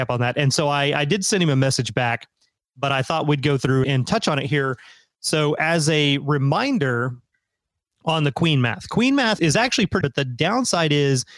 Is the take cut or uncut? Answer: cut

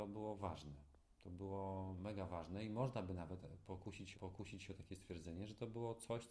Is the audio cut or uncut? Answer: cut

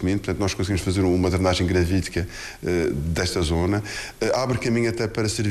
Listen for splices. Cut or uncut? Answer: uncut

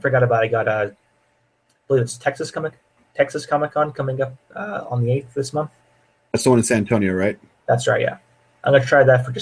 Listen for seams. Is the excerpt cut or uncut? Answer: uncut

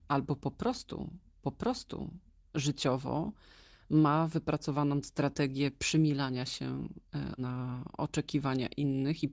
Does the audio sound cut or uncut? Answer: cut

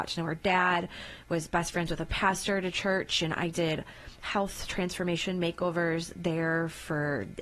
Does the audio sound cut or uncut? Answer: uncut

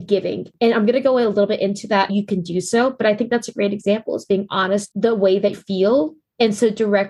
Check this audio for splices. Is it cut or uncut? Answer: cut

